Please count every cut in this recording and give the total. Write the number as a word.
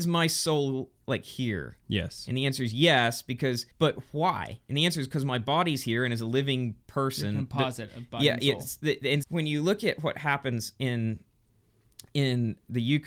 two